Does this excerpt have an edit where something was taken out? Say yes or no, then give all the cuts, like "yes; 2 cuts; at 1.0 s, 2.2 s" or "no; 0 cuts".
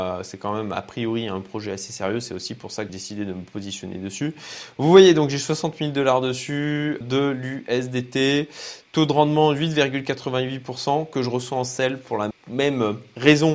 yes; 3 cuts; at 2.9 s, 7.0 s, 12.3 s